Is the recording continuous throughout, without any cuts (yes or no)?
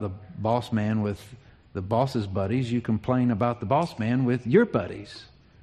yes